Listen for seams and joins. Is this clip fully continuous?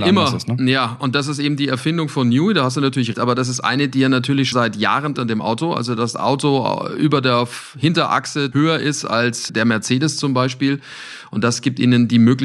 no; 6 cuts; at 3.1 s, 4.5 s, 5.1 s, 6.1 s, 8.5 s, 9.5 s

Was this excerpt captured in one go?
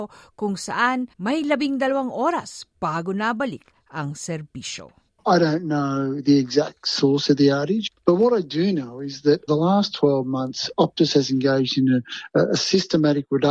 no; 3 cuts; at 1.1 s, 5.1 s, 9.5 s

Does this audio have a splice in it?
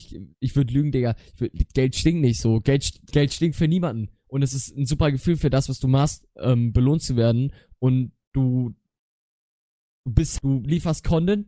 yes; 2 cuts; at 1.7 s, 10.4 s

